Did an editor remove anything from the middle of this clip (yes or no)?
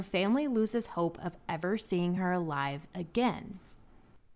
no